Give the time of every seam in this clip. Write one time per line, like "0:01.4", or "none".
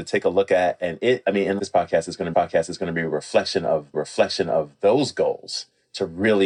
0:01.2
0:01.6
0:02.3
0:03.9